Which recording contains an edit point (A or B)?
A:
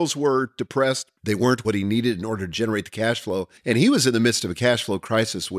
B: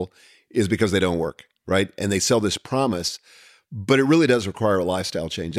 A